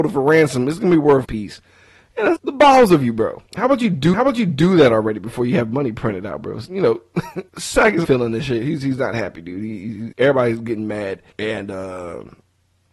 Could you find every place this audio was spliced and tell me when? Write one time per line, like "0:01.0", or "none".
0:01.2
0:02.4
0:03.5
0:04.1
0:06.7
0:07.5
0:08.0
0:10.1
0:11.3